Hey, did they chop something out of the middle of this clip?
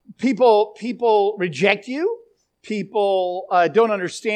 no; 0 cuts

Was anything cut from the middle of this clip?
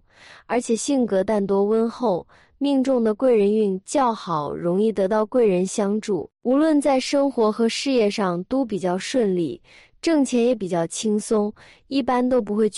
no; 0 cuts

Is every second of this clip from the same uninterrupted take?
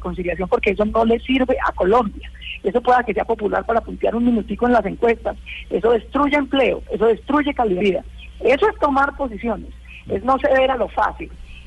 no; 1 cut; at 7.8 s

